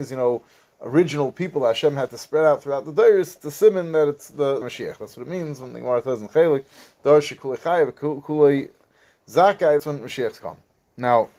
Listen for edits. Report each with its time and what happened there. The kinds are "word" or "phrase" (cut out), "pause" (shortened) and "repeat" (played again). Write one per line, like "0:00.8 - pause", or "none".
0:04.6 - word
0:09.8 - word
0:10.4 - phrase